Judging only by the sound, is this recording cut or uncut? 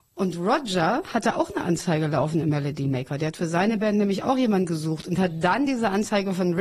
uncut